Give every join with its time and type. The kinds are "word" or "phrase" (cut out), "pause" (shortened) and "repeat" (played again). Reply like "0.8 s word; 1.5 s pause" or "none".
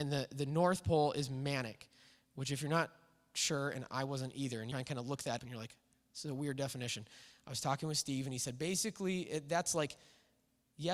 4.7 s phrase; 5.4 s word